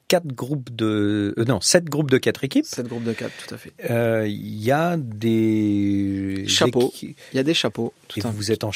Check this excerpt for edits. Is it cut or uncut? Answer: uncut